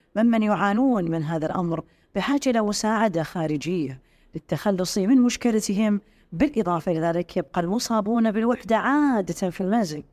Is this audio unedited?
yes; 0 cuts

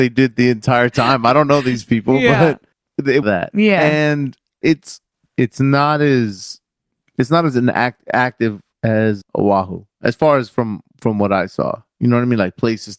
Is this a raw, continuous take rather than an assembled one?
no; 6 cuts; at 2.7 s, 3.2 s, 4.6 s, 5.1 s, 7.0 s, 9.2 s

